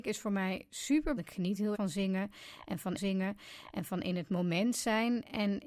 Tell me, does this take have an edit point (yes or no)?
yes